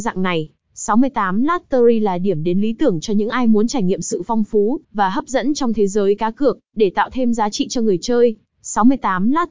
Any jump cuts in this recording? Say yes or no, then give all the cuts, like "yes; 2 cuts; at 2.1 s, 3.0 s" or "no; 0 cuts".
yes; 2 cuts; at 4.8 s, 6.7 s